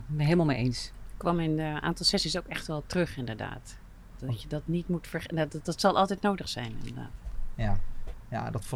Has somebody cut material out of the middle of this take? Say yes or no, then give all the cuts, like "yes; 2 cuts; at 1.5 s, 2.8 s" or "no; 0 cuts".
no; 0 cuts